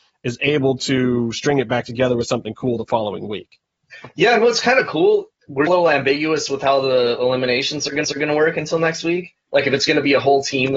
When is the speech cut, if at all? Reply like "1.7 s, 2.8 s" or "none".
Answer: 5.3 s, 5.7 s, 8.0 s